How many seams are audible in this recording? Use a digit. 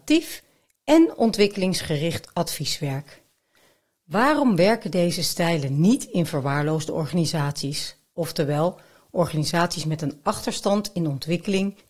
0